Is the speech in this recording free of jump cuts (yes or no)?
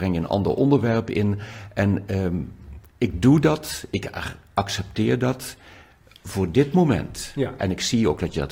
yes